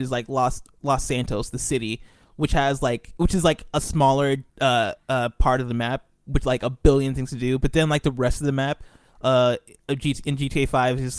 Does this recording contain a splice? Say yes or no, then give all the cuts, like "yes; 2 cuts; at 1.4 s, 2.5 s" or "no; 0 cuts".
yes; 1 cut; at 4.5 s